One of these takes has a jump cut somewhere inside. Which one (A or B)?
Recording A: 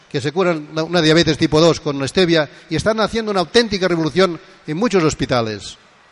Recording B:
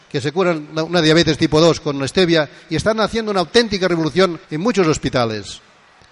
B